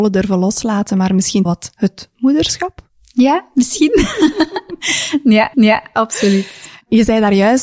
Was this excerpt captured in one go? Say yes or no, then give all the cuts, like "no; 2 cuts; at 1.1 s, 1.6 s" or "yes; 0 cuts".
no; 2 cuts; at 1.5 s, 5.5 s